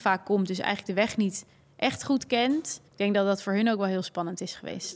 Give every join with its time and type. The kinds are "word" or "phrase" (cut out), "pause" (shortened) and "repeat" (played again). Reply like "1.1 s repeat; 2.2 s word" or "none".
2.9 s pause